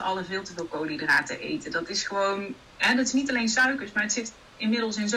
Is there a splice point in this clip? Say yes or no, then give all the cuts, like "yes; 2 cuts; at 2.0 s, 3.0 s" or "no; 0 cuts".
no; 0 cuts